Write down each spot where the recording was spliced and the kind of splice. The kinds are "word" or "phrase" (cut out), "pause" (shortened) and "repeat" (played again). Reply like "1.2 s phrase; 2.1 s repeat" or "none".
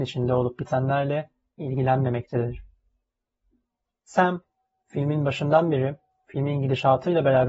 none